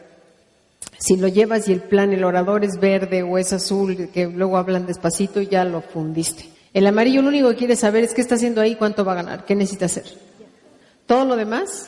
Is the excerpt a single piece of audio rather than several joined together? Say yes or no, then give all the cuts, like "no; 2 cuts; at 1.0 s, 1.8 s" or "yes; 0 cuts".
no; 1 cut; at 6.5 s